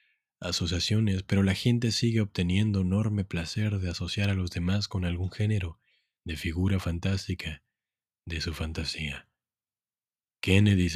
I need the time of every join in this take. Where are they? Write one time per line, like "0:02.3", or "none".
none